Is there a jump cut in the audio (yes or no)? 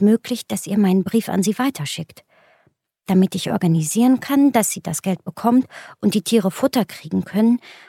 no